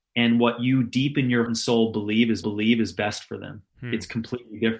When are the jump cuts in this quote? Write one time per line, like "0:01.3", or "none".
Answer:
0:01.5
0:02.4
0:03.7